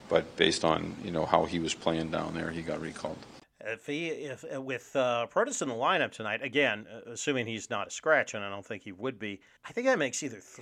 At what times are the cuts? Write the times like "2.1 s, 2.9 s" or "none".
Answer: 3.4 s, 9.6 s